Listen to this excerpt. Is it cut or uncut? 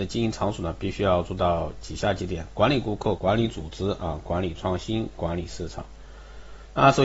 cut